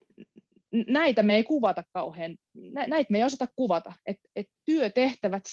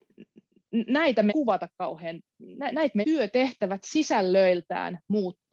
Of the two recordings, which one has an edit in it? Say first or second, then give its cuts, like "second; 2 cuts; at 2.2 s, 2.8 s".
second; 2 cuts; at 1.3 s, 3.0 s